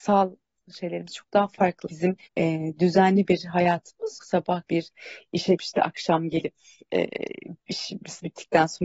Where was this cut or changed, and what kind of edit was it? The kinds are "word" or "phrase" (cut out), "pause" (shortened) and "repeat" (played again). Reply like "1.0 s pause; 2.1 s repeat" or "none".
1.9 s word; 2.3 s pause; 4.2 s word; 4.7 s word; 5.6 s word; 7.6 s pause